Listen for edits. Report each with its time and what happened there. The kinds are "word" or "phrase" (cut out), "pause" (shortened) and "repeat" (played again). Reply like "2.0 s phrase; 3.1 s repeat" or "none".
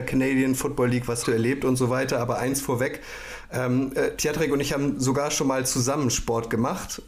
1.2 s word